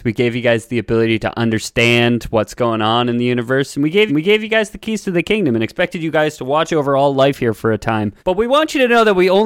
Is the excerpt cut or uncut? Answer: cut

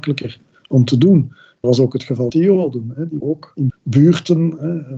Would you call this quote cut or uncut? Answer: cut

